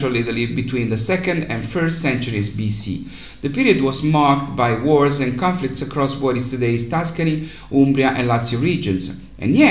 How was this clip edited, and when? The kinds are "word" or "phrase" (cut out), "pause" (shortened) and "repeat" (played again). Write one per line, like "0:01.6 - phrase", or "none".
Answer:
none